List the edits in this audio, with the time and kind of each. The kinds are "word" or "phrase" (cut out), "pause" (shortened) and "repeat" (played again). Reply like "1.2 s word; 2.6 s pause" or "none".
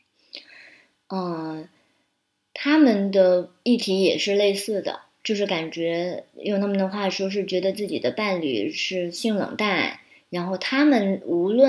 6.3 s word